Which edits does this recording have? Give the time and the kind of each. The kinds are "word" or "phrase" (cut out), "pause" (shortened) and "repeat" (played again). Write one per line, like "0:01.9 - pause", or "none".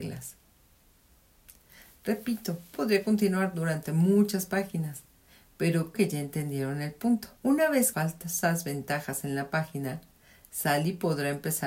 0:02.7 - word
0:05.9 - word
0:07.4 - pause
0:07.9 - phrase